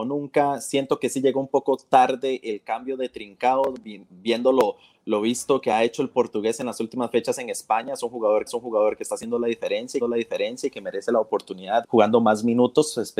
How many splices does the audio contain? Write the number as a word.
three